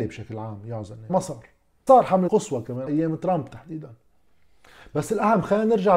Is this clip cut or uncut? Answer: cut